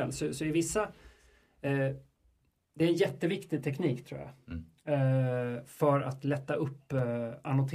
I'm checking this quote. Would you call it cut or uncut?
uncut